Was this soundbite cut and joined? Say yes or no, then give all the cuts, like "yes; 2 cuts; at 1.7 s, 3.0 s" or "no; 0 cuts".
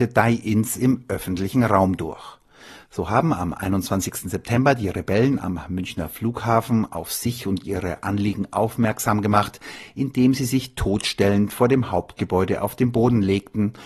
no; 0 cuts